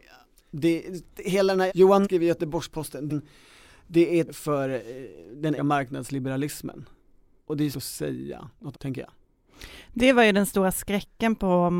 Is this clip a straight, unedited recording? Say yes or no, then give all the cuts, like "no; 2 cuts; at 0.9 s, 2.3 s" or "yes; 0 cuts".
no; 8 cuts; at 1.1 s, 1.7 s, 2.0 s, 3.1 s, 4.3 s, 5.6 s, 7.7 s, 8.7 s